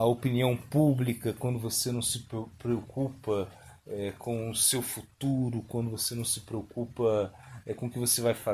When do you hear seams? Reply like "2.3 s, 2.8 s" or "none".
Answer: none